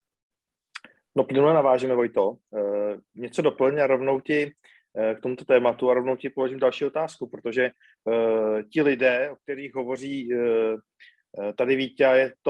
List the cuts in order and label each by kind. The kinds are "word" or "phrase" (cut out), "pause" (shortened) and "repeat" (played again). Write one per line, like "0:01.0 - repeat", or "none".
none

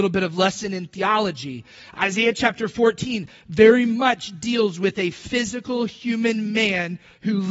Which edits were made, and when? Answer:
none

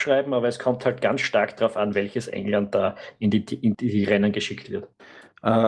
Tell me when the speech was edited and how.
0:03.7 - word

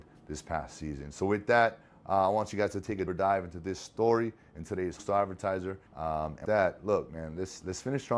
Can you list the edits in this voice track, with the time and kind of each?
0:03.1 - word
0:05.0 - word
0:05.9 - pause
0:06.4 - word

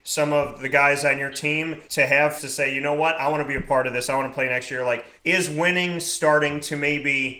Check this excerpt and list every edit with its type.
0:01.9 - pause
0:02.4 - word
0:05.2 - pause

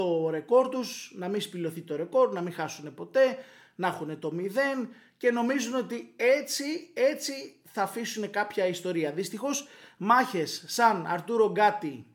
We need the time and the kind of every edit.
none

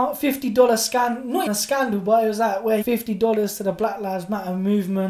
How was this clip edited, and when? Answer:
0:01.5 - word
0:02.8 - phrase

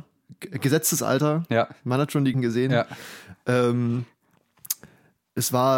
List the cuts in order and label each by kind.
0:02.3 - word

